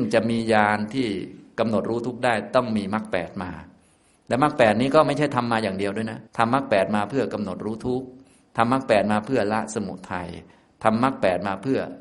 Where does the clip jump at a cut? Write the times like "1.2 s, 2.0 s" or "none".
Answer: 6.3 s